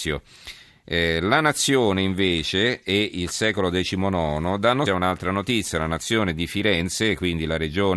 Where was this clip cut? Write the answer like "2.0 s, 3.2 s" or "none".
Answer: 4.9 s